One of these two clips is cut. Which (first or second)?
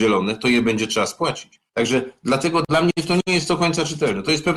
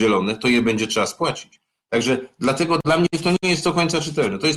first